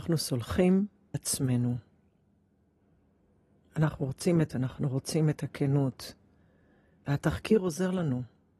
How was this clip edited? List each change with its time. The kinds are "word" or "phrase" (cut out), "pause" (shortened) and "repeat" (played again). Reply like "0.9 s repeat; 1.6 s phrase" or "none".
1.1 s word; 4.5 s word